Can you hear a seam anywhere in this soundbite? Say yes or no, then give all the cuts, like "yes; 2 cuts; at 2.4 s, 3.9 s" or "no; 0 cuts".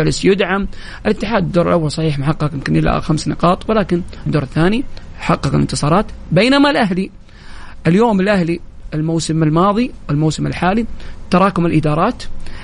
yes; 1 cut; at 4.3 s